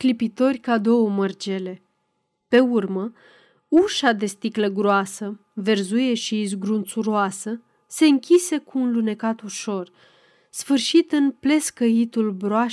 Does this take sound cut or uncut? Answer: uncut